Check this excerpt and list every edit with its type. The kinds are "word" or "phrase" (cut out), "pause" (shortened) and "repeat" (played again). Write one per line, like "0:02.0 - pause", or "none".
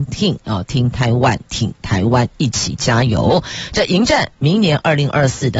none